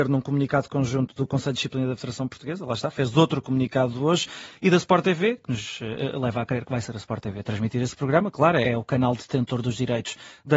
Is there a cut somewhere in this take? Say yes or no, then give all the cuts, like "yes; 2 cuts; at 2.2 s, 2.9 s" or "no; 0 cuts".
yes; 1 cut; at 8.6 s